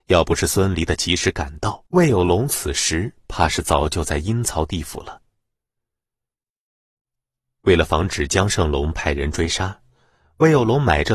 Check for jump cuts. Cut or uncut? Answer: cut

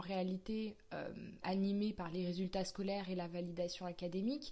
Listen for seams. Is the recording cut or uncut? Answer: cut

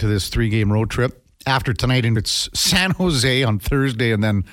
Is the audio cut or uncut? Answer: cut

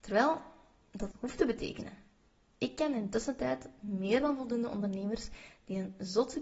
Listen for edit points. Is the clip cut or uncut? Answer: cut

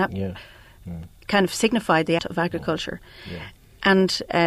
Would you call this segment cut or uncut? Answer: cut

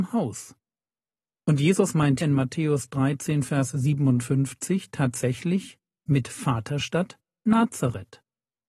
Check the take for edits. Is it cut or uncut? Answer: cut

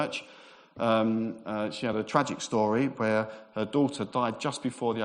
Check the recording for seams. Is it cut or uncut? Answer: uncut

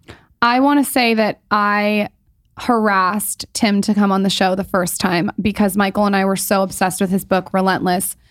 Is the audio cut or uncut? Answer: uncut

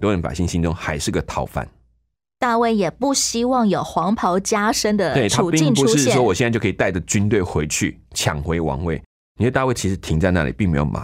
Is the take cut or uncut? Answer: uncut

